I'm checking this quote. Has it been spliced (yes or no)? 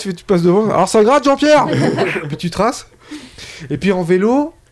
no